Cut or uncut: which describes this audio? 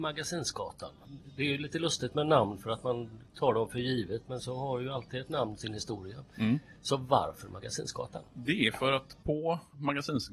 cut